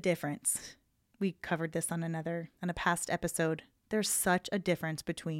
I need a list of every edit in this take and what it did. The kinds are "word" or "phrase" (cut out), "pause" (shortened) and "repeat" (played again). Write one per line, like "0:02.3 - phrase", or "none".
0:02.6 - word